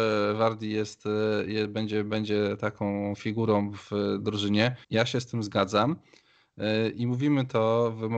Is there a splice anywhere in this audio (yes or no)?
yes